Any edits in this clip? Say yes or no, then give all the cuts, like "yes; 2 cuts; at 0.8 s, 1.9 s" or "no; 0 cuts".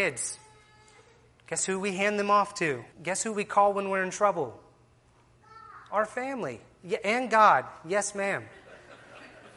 yes; 1 cut; at 2.9 s